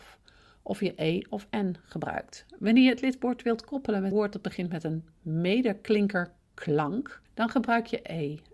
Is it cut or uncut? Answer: cut